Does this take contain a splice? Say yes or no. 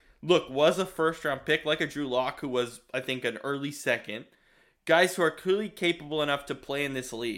no